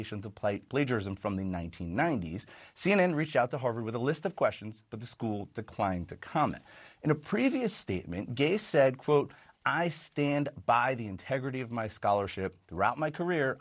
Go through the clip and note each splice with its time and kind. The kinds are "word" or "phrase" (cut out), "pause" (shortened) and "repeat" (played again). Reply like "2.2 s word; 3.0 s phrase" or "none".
none